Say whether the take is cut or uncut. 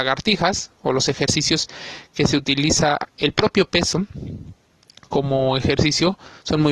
cut